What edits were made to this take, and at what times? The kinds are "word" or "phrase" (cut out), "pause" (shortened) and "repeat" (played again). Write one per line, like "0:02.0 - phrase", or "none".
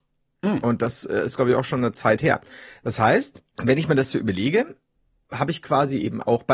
0:03.5 - pause